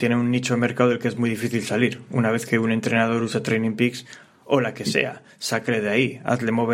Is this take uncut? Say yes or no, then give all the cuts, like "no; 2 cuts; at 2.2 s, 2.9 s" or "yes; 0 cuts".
yes; 0 cuts